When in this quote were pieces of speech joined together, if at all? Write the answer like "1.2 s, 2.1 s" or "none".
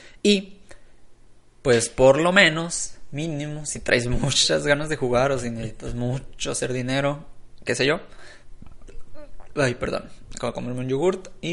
none